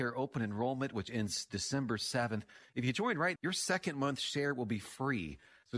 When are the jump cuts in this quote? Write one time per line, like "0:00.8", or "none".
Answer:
0:03.4